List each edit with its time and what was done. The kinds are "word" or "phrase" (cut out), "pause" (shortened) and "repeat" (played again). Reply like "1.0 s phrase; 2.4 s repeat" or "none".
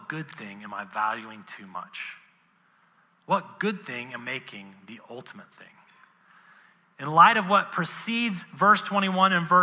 4.2 s word